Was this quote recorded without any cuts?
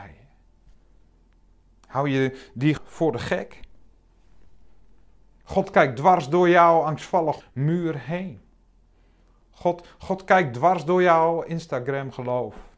no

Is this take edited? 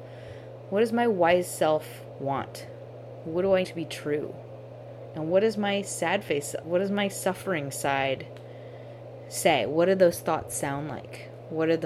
yes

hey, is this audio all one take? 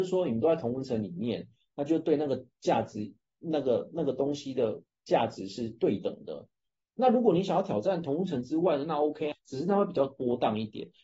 no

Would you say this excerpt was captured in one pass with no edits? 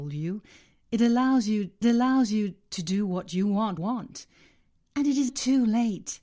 no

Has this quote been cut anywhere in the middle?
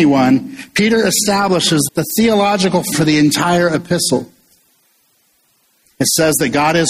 yes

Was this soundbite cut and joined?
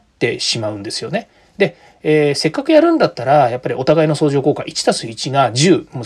no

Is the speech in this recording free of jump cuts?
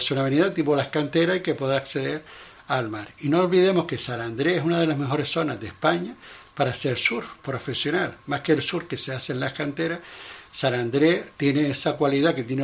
yes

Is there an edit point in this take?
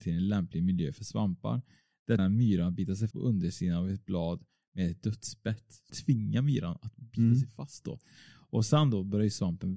yes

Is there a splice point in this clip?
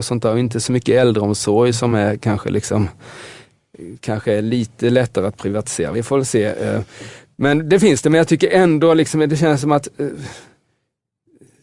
no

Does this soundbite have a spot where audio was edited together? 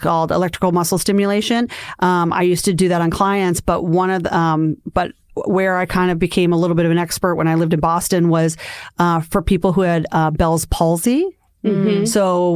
no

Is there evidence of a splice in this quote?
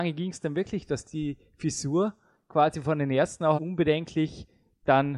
yes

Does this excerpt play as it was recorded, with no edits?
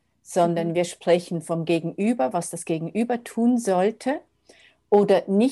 yes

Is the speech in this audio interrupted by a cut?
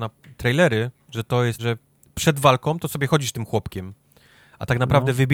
yes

